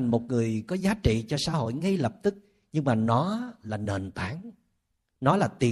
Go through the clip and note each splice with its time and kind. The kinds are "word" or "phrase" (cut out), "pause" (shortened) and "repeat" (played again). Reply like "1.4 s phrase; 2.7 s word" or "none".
none